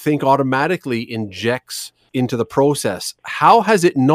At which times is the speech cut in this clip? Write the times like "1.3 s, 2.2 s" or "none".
2.1 s